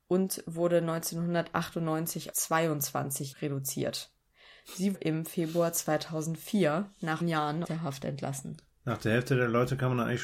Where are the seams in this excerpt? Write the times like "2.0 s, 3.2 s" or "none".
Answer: 2.3 s, 3.3 s, 4.9 s, 7.2 s, 7.6 s